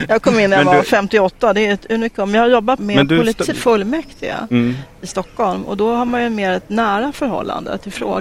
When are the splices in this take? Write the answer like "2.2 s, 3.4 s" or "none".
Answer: 2.8 s, 3.5 s